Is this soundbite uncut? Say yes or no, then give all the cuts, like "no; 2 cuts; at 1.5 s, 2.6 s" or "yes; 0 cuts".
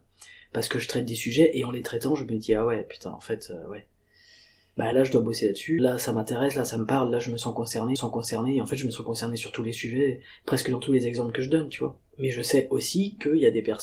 no; 4 cuts; at 4.9 s, 5.8 s, 8.0 s, 12.0 s